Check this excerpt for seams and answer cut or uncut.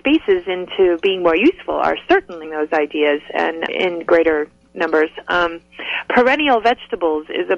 cut